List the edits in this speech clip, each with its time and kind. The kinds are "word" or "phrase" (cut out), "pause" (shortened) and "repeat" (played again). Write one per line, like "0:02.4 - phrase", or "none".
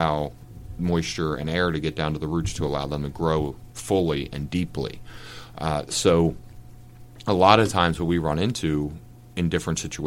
none